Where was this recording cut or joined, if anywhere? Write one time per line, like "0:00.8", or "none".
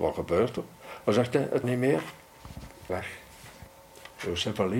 0:01.6
0:02.9